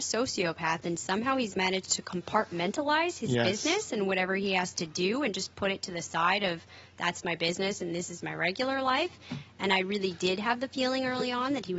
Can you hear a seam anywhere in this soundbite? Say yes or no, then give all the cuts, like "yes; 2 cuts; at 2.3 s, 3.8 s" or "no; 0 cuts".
no; 0 cuts